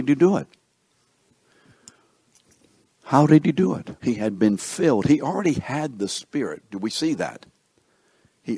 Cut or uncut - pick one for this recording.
cut